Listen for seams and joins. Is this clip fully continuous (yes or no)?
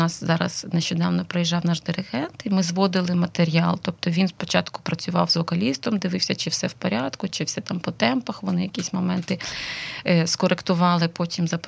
yes